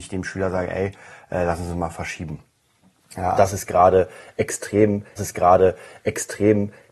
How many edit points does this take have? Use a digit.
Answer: 2